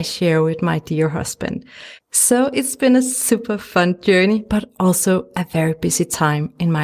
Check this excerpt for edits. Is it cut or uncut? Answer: uncut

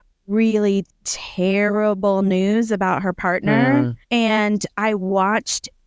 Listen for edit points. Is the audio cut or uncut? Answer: cut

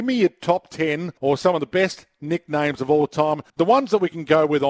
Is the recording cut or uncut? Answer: cut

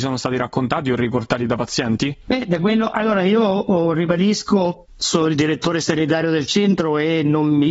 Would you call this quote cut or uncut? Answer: uncut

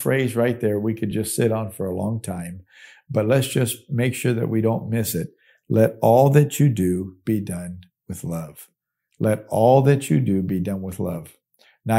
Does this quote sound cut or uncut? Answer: uncut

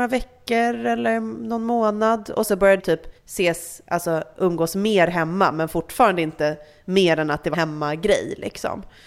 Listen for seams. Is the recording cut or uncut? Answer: cut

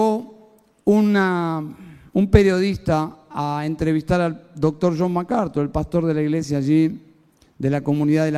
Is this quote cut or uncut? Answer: uncut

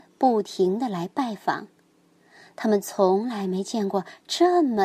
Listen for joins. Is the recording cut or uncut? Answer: uncut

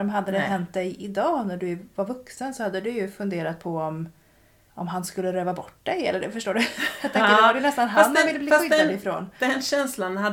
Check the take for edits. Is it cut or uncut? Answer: uncut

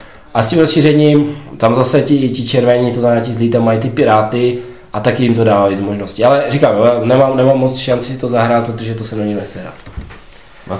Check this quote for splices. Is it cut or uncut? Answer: uncut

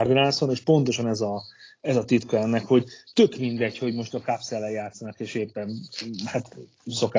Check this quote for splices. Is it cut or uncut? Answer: uncut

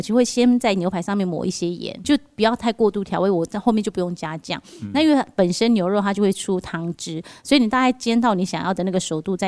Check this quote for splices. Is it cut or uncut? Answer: cut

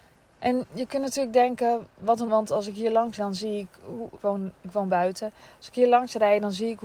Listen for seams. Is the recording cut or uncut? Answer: cut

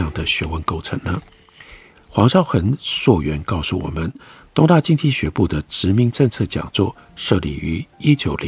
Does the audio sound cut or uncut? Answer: uncut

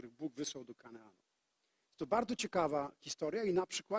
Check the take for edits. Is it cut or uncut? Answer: uncut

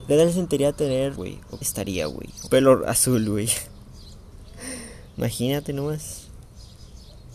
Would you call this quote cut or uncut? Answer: cut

